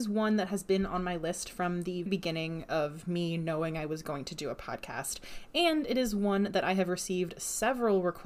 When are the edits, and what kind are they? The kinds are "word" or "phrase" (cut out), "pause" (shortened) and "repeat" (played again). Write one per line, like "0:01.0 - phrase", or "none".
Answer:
0:02.1 - word